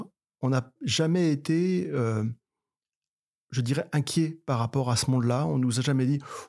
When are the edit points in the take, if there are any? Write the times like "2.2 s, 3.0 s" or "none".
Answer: none